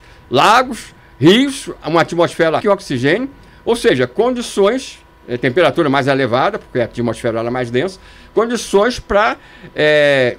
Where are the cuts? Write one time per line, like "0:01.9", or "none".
0:02.6